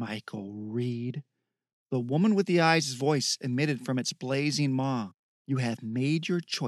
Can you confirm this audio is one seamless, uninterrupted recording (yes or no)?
yes